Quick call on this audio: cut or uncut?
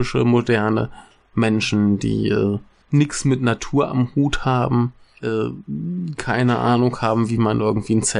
uncut